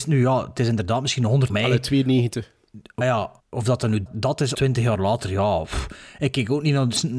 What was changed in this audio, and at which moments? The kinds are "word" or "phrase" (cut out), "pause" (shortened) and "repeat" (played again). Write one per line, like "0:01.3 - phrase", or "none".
0:01.5 - phrase
0:03.0 - word
0:03.4 - pause
0:04.1 - word
0:04.5 - word